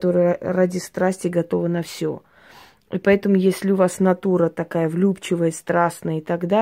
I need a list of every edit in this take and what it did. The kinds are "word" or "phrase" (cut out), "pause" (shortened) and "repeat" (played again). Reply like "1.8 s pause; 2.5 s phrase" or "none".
none